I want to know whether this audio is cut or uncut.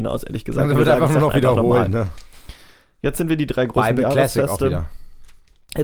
uncut